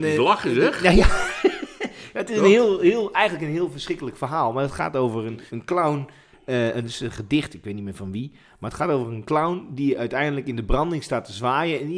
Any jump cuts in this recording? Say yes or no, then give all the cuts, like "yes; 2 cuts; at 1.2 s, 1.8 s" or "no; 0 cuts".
yes; 1 cut; at 5.5 s